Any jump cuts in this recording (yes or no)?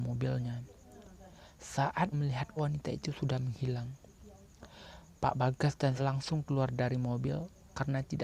yes